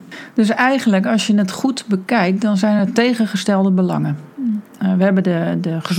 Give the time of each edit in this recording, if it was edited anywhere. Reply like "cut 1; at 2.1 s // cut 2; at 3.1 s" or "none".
none

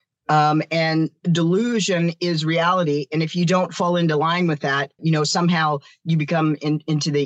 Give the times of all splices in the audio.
cut 1; at 5.0 s

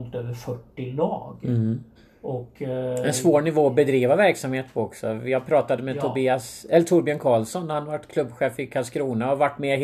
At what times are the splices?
cut 1; at 2.0 s

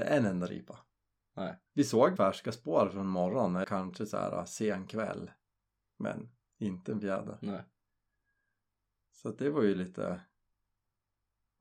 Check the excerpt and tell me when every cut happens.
cut 1; at 1.7 s // cut 2; at 2.2 s // cut 3; at 3.6 s

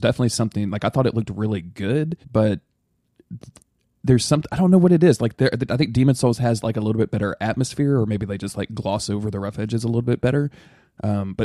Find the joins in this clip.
cut 1; at 2.2 s

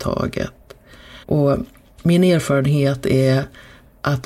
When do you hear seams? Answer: cut 1; at 1.2 s

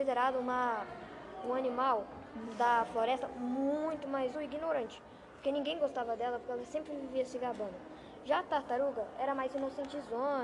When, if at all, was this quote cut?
cut 1; at 4.3 s

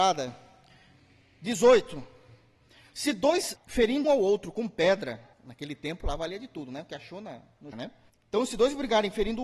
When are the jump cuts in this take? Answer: cut 1; at 3.6 s // cut 2; at 4.0 s // cut 3; at 5.3 s // cut 4; at 7.7 s // cut 5; at 8.1 s

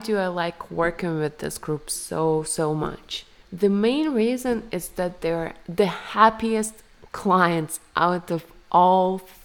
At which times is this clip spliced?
none

